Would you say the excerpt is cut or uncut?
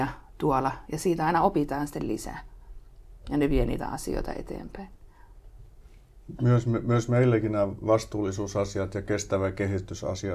uncut